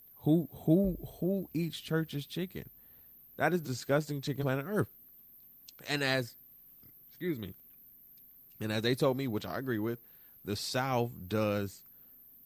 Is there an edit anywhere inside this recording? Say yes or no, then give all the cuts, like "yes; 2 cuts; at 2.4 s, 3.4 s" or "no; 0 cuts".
yes; 2 cuts; at 3.6 s, 4.4 s